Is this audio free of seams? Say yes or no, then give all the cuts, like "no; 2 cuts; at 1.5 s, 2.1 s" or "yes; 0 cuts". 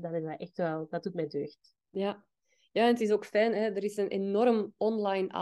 yes; 0 cuts